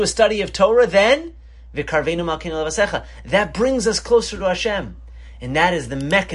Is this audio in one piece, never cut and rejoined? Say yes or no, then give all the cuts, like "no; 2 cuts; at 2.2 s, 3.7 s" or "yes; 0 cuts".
yes; 0 cuts